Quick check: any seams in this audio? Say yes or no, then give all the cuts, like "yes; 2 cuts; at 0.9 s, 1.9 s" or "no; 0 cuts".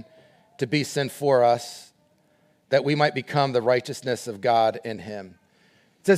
no; 0 cuts